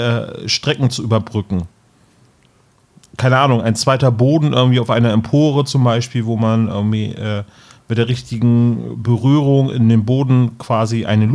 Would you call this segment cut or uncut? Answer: uncut